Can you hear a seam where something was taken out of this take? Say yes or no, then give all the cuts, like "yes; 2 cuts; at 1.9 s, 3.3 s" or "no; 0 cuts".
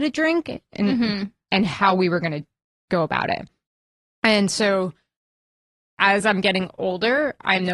no; 0 cuts